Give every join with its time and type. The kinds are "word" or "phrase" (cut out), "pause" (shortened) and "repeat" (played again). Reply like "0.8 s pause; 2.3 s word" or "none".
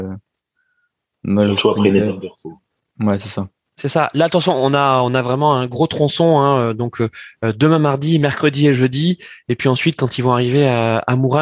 none